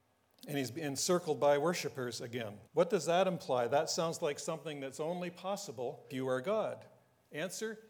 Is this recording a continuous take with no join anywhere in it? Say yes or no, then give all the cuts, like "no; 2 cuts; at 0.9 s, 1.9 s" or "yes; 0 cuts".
no; 2 cuts; at 2.7 s, 6.1 s